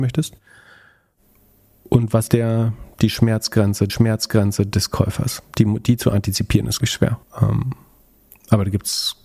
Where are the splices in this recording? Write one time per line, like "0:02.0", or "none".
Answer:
0:02.3
0:03.9
0:06.8
0:07.2